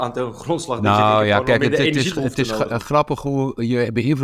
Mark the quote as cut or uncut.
uncut